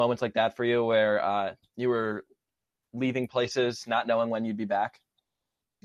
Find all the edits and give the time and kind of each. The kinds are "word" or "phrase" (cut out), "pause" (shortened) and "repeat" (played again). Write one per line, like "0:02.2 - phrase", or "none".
none